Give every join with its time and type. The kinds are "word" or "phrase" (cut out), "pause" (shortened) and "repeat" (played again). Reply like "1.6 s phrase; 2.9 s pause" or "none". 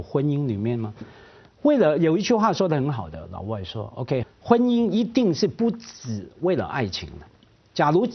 4.2 s word